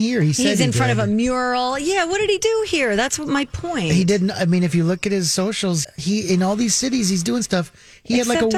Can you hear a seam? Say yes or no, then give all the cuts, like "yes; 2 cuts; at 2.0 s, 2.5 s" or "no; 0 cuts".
yes; 1 cut; at 5.8 s